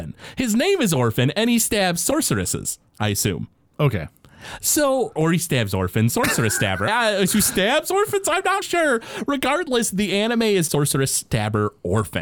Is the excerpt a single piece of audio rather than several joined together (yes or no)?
no